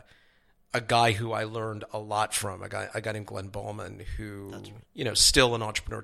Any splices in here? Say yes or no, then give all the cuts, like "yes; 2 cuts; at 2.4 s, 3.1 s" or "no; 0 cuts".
yes; 1 cut; at 4.9 s